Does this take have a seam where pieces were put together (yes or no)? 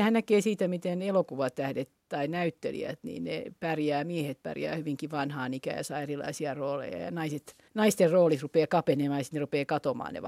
yes